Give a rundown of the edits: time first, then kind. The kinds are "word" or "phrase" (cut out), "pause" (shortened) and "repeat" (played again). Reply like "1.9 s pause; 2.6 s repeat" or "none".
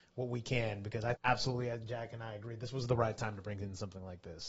1.2 s word